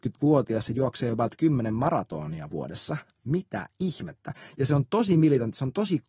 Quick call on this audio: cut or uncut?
uncut